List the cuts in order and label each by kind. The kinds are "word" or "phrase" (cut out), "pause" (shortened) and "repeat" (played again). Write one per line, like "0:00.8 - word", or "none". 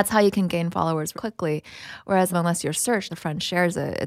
0:01.1 - word
0:02.3 - phrase
0:03.1 - phrase